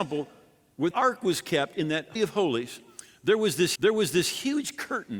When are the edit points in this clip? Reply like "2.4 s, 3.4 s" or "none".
0.9 s, 2.2 s, 3.8 s